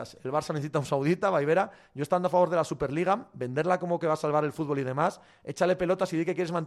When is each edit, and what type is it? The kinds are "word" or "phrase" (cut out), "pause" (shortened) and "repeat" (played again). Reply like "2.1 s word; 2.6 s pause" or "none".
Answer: none

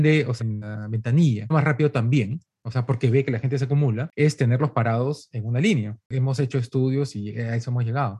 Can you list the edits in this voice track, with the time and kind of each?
1.5 s word

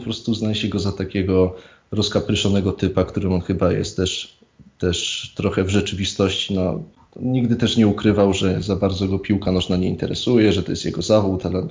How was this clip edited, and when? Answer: none

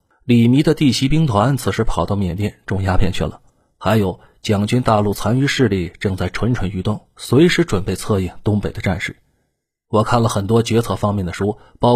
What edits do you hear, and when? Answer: none

